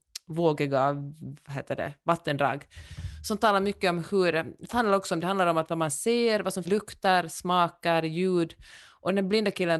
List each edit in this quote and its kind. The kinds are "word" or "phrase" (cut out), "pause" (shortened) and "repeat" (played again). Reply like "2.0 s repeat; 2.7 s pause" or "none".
4.7 s word; 6.7 s phrase